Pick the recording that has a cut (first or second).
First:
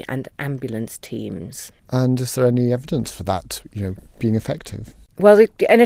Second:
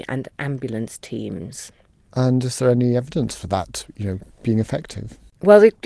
first